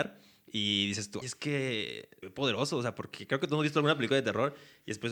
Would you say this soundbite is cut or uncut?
cut